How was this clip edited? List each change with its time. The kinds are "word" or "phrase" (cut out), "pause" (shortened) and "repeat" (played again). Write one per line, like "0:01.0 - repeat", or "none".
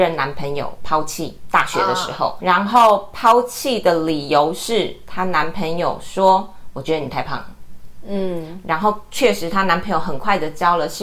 0:02.4 - word